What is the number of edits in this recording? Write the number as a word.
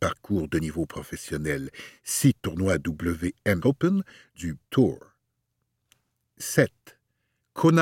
three